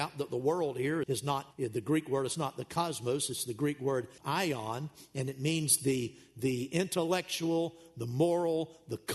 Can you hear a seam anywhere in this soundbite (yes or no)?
yes